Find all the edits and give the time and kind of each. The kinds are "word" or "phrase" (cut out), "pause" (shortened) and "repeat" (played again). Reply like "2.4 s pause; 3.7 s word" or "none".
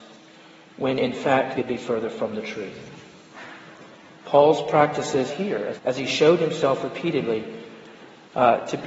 1.6 s word; 5.3 s phrase; 5.8 s phrase